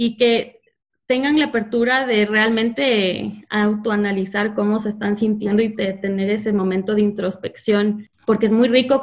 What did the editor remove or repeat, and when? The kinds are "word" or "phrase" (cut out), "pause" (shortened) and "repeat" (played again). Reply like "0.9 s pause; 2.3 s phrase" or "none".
8.1 s pause